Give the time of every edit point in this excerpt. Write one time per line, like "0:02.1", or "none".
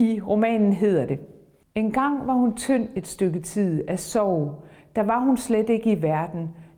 none